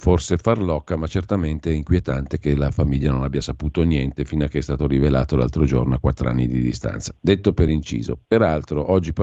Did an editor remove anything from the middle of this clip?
no; 0 cuts

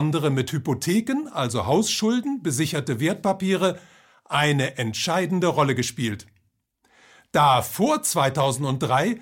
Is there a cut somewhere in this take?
no; 0 cuts

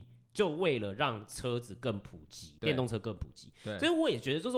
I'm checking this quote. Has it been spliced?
yes; 1 cut; at 2.6 s

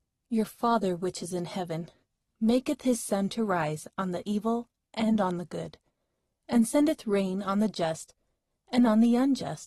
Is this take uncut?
yes; 0 cuts

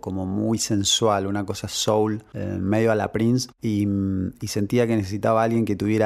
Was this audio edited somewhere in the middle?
no; 0 cuts

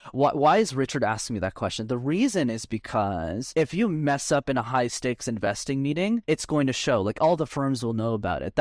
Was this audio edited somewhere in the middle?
no; 0 cuts

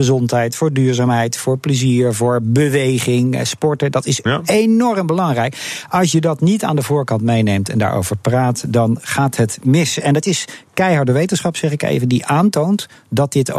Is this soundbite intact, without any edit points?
yes; 0 cuts

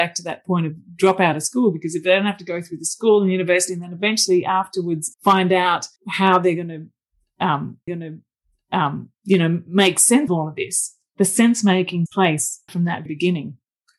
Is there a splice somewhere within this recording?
yes; 7 cuts; at 5.1 s, 6.0 s, 7.9 s, 10.3 s, 12.1 s, 12.7 s, 13.1 s

